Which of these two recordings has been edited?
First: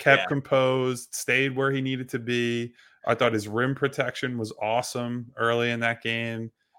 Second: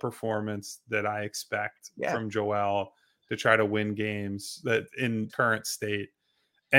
second; 1 cut; at 5.3 s

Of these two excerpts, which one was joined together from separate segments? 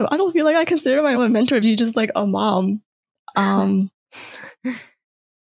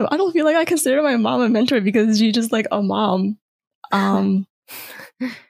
first; 2 cuts; at 1.2 s, 1.6 s

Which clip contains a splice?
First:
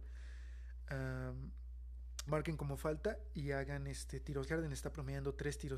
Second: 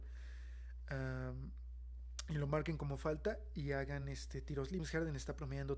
first; 2 cuts; at 2.3 s, 4.5 s

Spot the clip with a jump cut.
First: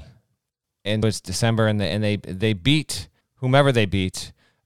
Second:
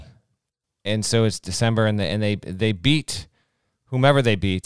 first; 2 cuts; at 1.0 s, 3.2 s

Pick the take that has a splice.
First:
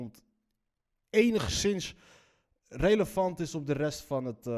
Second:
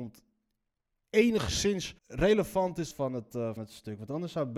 second; 3 cuts; at 2.0 s, 2.9 s, 3.6 s

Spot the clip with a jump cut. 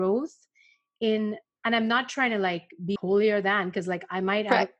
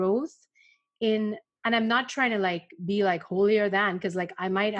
first; 1 cut; at 3.0 s

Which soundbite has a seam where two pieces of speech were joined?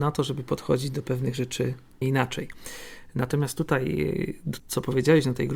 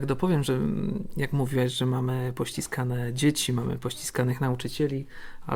first; 2 cuts; at 2.0 s, 4.6 s

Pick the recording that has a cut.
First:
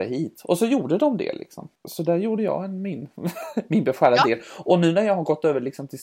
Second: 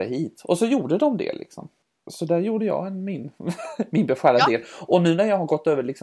first; 1 cut; at 1.8 s

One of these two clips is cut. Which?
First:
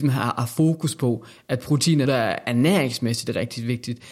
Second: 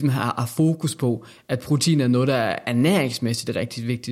first; 1 cut; at 2.1 s

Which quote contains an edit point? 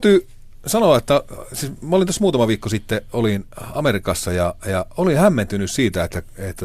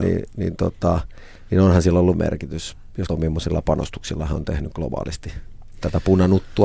second; 2 cuts; at 2.1 s, 3.1 s

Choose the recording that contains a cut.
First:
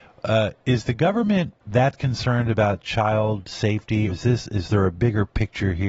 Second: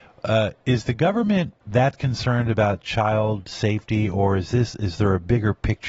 first; 1 cut; at 4.1 s

